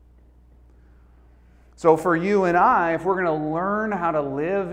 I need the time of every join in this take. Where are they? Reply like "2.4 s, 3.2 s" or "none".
none